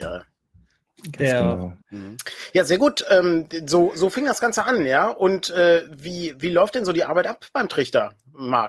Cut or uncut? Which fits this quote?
cut